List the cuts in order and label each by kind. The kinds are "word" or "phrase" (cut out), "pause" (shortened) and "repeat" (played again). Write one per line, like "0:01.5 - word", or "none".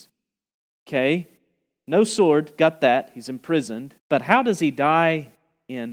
0:04.0 - pause